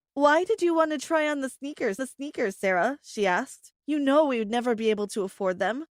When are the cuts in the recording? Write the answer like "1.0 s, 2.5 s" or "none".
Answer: 2.0 s